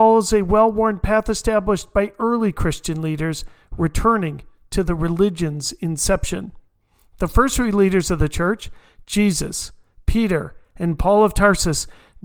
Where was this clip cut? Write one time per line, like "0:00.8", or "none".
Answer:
none